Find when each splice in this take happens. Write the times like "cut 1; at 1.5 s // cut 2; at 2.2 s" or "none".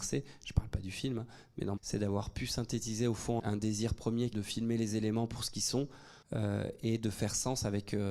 cut 1; at 1.8 s // cut 2; at 3.4 s // cut 3; at 4.3 s // cut 4; at 6.2 s